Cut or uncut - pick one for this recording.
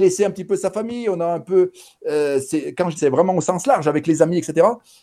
cut